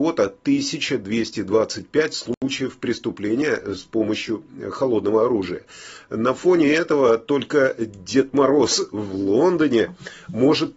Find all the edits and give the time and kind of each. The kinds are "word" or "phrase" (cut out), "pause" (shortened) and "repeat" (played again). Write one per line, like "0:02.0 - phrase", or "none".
none